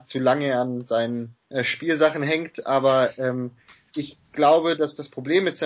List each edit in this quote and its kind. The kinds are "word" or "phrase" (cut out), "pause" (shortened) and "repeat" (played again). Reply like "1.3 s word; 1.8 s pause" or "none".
1.4 s pause